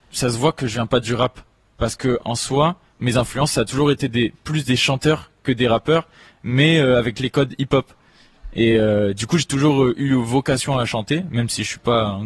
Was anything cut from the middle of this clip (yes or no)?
no